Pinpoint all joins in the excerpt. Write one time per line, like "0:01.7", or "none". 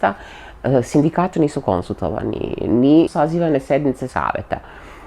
0:01.3
0:03.1
0:04.1